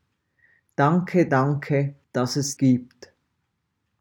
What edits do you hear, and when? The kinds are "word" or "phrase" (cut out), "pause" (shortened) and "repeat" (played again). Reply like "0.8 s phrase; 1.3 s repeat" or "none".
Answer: 1.3 s word; 2.0 s pause; 2.6 s word

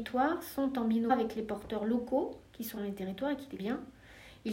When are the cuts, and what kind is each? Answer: 1.1 s word; 2.8 s word; 3.6 s word

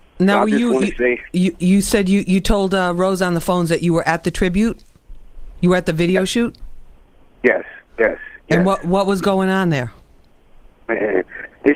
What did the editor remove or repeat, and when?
none

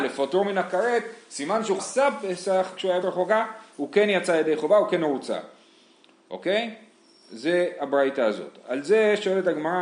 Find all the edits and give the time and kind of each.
1.8 s phrase; 3.0 s word

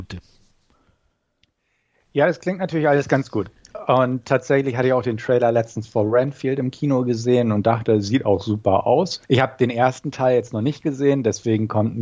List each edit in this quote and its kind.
9.2 s pause

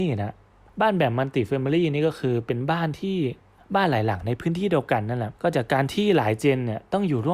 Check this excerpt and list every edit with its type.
3.6 s pause; 5.4 s pause

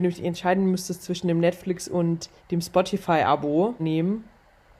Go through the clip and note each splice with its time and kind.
2.4 s pause; 3.8 s phrase

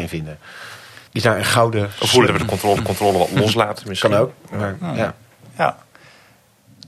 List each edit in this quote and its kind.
1.1 s pause; 2.3 s word; 2.8 s repeat

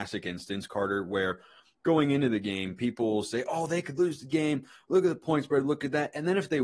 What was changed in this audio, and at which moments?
none

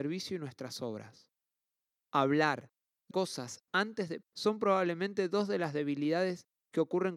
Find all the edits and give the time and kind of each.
3.1 s word; 4.2 s word

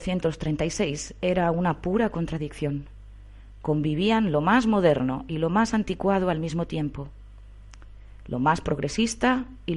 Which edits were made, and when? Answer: none

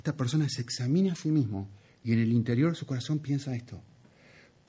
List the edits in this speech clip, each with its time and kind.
none

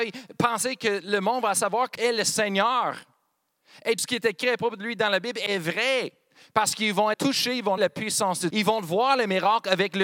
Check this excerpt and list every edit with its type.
1.9 s word; 4.0 s word; 7.1 s word; 7.8 s word; 8.5 s word

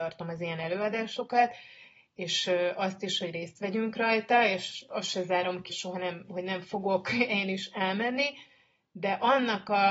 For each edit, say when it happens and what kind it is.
5.7 s word

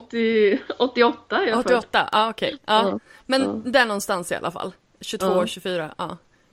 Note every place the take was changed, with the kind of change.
none

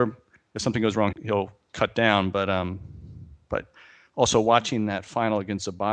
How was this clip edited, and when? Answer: 1.1 s word

